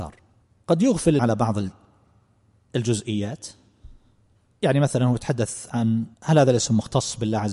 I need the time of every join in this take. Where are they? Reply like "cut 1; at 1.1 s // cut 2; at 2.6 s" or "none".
cut 1; at 1.2 s // cut 2; at 6.1 s